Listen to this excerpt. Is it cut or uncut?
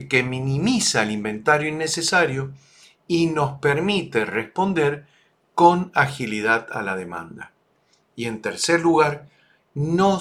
uncut